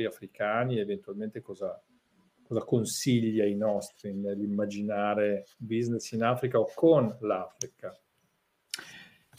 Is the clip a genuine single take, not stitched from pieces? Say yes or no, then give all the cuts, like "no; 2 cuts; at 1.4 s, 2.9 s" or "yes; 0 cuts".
yes; 0 cuts